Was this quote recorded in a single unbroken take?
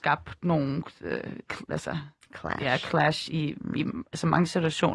yes; 0 cuts

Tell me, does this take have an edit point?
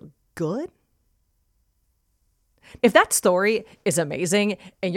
yes; 1 cut; at 2.8 s

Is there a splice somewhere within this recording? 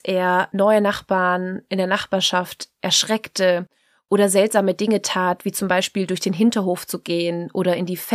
no; 0 cuts

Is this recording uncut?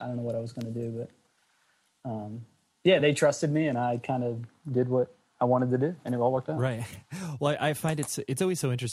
yes; 0 cuts

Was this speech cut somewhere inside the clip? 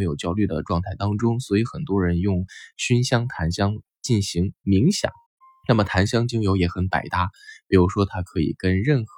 yes; 1 cut; at 5.3 s

